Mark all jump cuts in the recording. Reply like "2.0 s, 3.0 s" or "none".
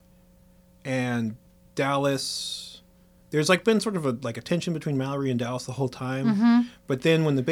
none